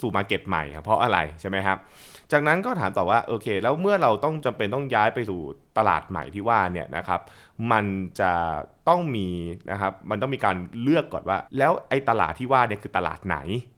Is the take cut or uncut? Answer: cut